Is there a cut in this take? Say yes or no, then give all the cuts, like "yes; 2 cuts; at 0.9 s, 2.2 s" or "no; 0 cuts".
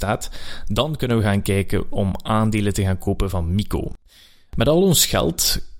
no; 0 cuts